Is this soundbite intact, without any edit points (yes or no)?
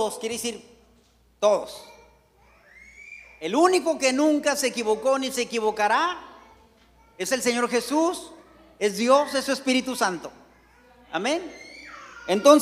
yes